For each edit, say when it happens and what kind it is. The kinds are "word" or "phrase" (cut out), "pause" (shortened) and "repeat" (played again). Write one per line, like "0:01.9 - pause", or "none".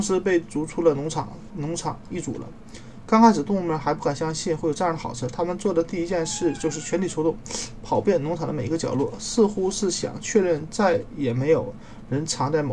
0:01.5 - phrase